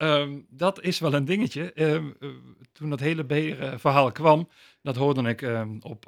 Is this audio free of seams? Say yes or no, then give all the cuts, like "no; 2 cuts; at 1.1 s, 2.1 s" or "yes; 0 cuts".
yes; 0 cuts